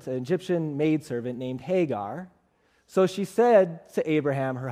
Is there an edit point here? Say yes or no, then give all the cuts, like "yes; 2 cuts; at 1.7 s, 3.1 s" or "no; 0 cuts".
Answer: no; 0 cuts